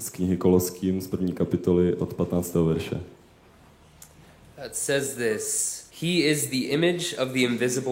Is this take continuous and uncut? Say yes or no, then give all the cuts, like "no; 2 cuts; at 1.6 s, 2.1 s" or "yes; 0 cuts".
no; 1 cut; at 5.9 s